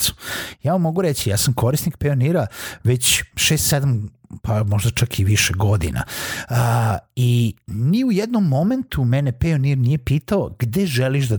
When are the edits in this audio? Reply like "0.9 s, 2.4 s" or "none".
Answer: none